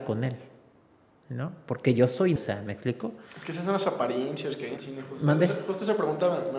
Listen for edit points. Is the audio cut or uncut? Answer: cut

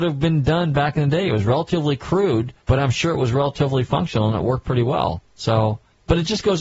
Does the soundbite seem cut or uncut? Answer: uncut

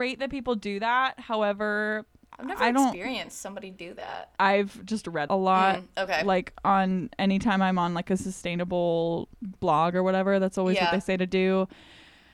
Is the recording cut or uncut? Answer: cut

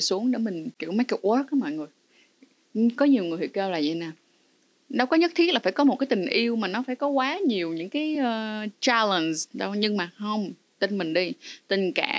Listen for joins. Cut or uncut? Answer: uncut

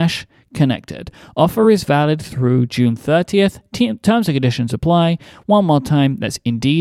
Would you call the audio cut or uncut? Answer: uncut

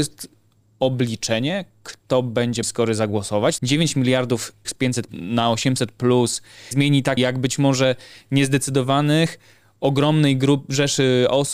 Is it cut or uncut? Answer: cut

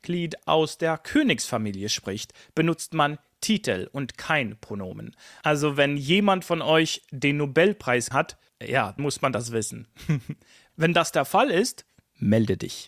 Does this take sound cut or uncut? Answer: cut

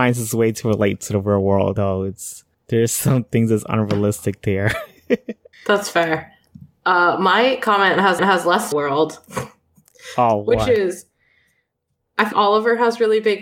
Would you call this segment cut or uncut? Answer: cut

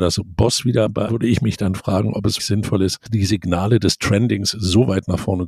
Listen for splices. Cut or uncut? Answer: cut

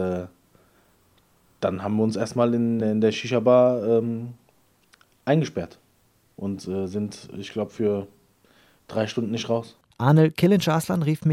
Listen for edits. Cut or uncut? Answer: cut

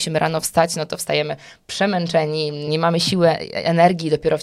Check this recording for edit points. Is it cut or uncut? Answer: cut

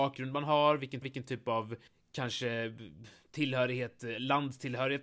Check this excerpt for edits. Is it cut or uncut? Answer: cut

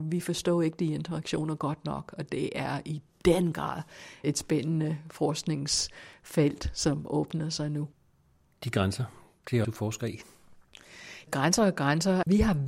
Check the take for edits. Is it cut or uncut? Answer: cut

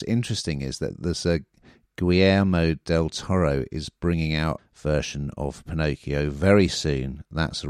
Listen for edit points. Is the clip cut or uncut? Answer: cut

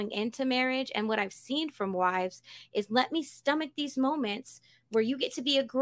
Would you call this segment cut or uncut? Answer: uncut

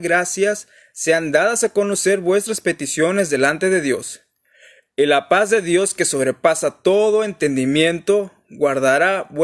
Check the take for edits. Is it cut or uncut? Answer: uncut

